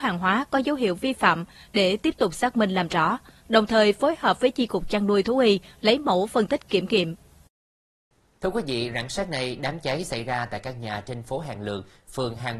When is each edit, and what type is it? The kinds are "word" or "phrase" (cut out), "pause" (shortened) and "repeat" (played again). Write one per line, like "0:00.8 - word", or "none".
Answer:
none